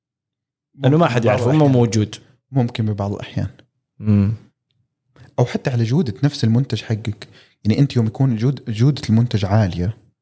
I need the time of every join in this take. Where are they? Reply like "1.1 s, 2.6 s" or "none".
none

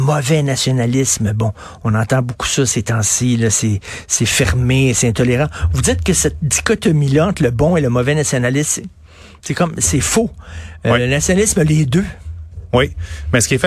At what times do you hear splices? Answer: none

